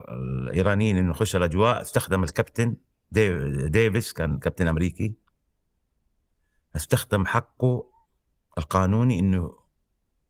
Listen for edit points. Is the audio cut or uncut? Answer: uncut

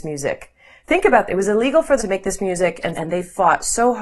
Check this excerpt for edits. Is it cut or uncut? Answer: cut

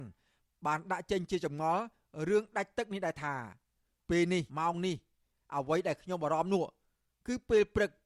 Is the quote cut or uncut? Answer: cut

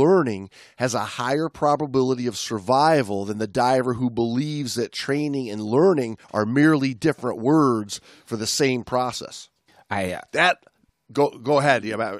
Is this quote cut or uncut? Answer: cut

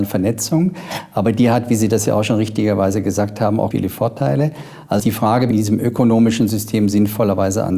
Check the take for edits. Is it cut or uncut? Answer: cut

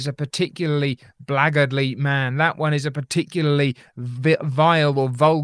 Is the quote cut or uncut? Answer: uncut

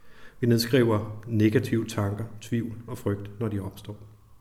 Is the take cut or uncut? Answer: uncut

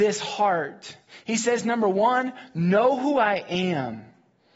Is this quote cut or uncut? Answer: uncut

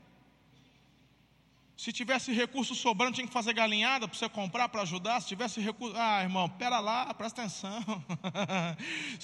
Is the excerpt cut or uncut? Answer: uncut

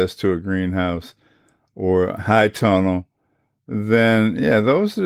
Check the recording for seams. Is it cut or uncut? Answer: uncut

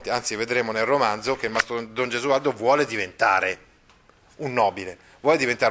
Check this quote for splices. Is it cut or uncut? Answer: uncut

